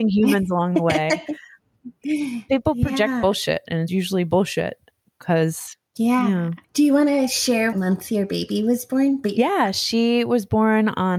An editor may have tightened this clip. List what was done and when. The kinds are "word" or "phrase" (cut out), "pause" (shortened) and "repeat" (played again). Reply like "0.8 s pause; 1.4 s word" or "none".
3.9 s word; 5.9 s pause; 6.6 s pause; 7.7 s word